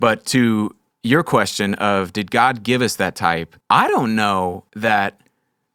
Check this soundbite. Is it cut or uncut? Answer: cut